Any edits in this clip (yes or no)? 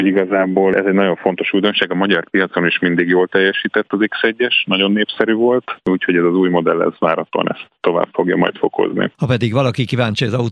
yes